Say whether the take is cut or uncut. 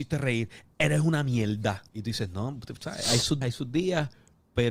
cut